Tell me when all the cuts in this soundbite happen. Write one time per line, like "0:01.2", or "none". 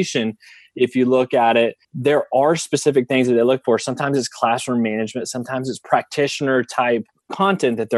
0:01.8